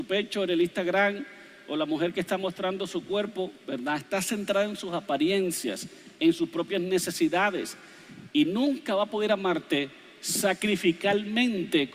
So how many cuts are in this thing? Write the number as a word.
zero